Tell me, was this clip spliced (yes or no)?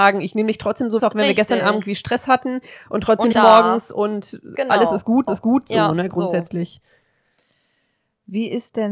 yes